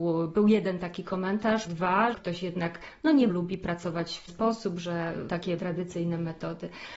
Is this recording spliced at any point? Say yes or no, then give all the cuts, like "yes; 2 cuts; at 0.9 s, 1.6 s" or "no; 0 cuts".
yes; 6 cuts; at 1.7 s, 2.1 s, 3.3 s, 4.3 s, 5.3 s, 5.6 s